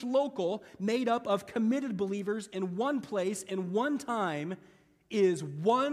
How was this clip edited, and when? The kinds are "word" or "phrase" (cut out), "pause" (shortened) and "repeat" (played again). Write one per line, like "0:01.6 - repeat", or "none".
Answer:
none